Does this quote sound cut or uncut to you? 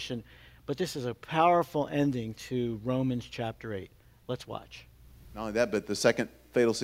uncut